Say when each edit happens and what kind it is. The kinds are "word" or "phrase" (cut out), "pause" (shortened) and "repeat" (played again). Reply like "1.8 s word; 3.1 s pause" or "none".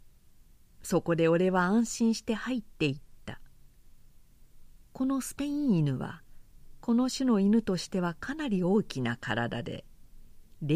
none